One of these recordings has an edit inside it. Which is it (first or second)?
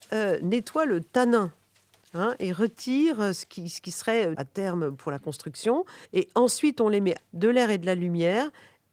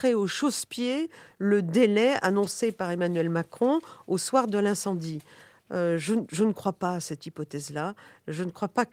first